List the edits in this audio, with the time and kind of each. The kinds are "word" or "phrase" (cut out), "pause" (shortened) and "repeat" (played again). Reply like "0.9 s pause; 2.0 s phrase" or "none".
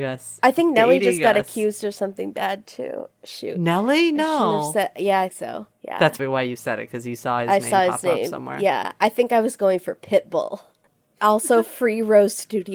5.3 s word; 5.7 s pause; 6.2 s word